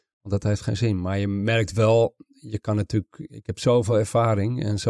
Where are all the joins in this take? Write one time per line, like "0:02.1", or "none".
none